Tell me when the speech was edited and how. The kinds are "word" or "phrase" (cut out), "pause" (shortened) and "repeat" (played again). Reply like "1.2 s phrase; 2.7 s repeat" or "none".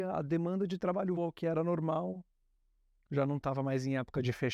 1.2 s word